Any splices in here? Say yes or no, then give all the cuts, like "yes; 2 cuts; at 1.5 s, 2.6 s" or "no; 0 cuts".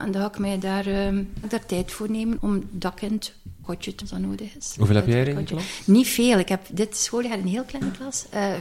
yes; 4 cuts; at 1.4 s, 2.4 s, 3.6 s, 4.0 s